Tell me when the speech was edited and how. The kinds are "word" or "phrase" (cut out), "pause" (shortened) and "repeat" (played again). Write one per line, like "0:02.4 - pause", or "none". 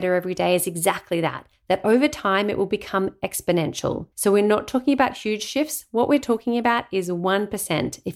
0:04.1 - pause

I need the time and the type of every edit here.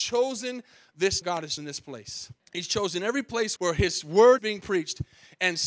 0:01.2 - phrase
0:01.6 - word
0:02.4 - pause
0:03.6 - word
0:04.4 - word

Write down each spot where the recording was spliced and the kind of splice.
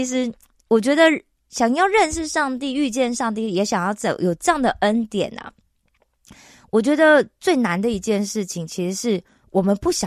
none

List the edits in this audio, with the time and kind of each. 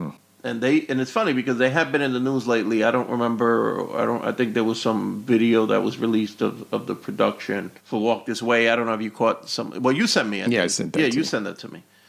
0:07.8 - pause

